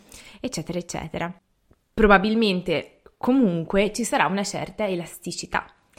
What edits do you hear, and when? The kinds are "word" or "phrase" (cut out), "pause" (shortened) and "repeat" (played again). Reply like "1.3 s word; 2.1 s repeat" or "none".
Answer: none